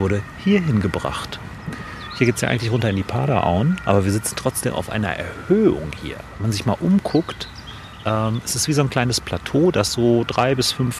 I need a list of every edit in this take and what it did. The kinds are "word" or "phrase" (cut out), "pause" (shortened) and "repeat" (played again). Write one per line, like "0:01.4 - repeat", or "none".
none